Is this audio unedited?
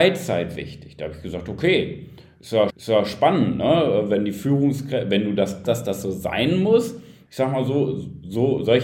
no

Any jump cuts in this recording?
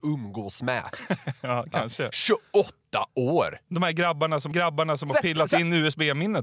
yes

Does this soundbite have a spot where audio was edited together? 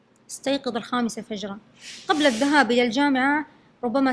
no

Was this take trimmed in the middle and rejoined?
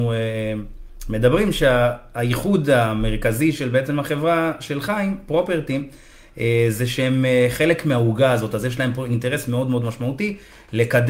no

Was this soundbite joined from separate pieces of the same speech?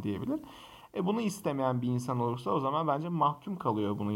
no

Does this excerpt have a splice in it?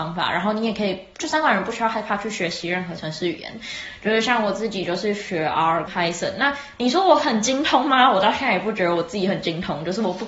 yes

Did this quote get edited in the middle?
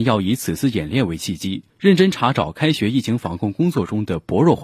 yes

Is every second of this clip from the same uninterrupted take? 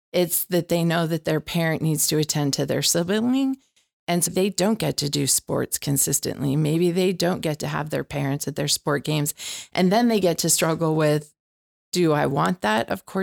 no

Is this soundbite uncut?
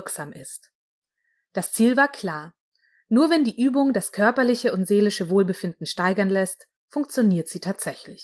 yes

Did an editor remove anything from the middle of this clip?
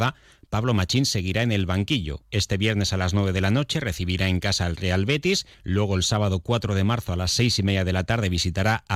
yes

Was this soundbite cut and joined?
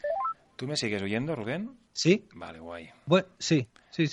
yes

